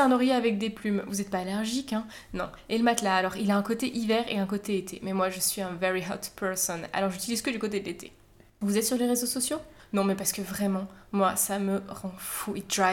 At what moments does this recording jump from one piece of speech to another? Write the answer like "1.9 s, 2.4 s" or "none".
none